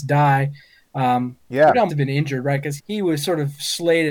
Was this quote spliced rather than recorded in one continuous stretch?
yes; 2 cuts; at 1.9 s, 2.8 s

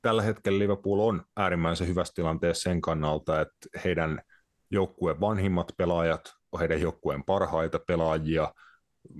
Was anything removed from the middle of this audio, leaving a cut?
no; 0 cuts

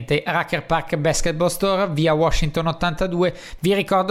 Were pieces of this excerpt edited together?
no; 0 cuts

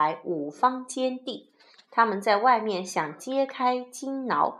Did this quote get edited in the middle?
no; 0 cuts

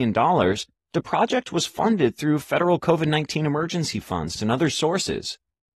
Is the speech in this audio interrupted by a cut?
yes; 1 cut; at 4.4 s

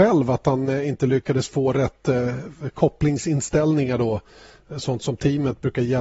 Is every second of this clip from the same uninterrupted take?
yes; 0 cuts

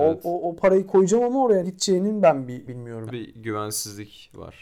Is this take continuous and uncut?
no; 3 cuts; at 1.6 s, 2.7 s, 3.1 s

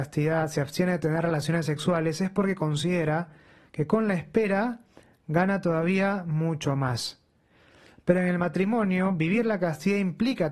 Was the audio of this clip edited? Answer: no; 0 cuts

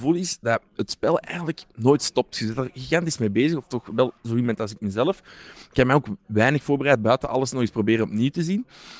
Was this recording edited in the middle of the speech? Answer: yes; 2 cuts; at 4.2 s, 6.2 s

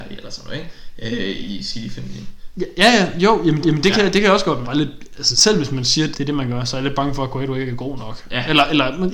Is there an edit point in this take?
yes; 4 cuts; at 3.6 s, 4.6 s, 5.3 s, 6.1 s

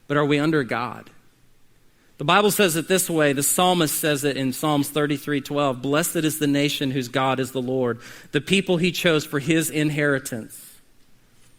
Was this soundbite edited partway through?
no; 0 cuts

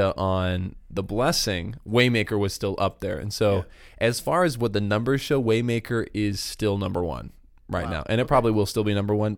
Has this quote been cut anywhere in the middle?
no; 0 cuts

